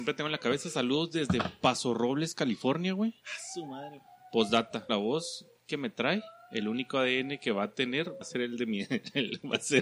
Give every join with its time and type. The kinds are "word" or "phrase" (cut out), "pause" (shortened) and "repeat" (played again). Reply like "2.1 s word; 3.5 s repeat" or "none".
4.9 s phrase; 8.2 s word